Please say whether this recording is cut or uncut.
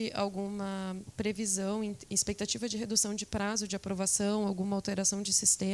uncut